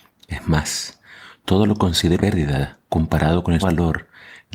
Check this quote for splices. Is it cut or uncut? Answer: cut